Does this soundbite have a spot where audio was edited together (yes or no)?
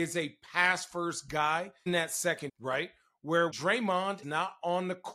yes